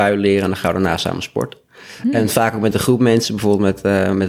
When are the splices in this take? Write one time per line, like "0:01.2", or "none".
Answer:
none